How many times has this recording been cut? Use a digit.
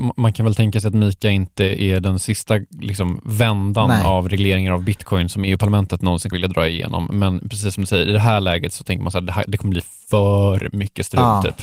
1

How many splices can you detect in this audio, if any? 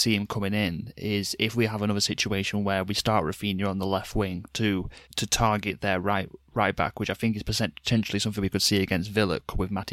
1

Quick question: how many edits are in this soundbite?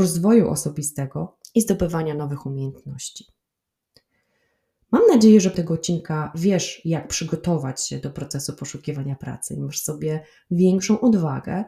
1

